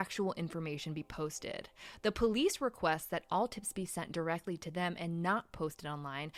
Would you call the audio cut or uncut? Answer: uncut